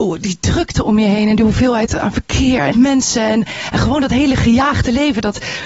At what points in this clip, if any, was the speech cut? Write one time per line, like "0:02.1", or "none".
0:02.7